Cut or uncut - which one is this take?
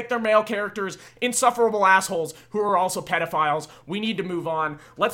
uncut